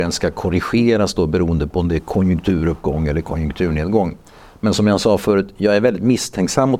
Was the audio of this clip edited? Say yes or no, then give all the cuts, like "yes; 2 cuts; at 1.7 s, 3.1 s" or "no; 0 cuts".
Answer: no; 0 cuts